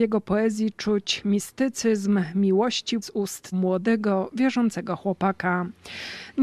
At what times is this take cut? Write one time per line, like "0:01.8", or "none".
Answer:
0:03.0
0:03.5